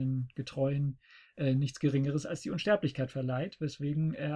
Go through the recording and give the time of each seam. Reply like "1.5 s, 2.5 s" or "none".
none